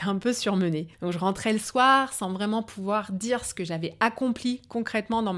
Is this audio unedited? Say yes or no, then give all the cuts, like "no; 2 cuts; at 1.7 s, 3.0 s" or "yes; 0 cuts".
yes; 0 cuts